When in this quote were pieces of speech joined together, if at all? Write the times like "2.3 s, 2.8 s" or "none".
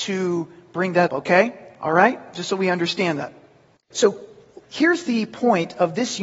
1.1 s